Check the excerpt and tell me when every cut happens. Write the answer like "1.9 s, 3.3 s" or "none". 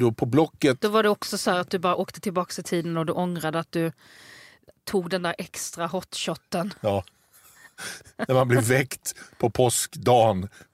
none